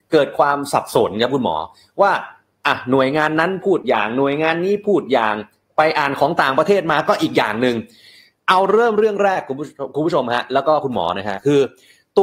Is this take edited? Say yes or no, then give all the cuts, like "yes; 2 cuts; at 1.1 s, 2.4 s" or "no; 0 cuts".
no; 0 cuts